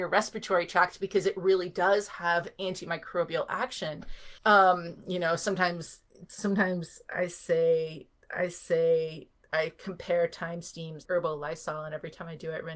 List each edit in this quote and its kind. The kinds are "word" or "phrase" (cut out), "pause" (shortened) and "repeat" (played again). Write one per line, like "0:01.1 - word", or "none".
0:04.4 - pause
0:08.3 - repeat
0:11.0 - phrase